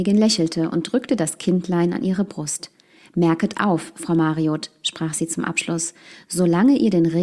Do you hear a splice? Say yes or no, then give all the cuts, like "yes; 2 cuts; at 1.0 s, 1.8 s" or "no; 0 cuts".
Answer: no; 0 cuts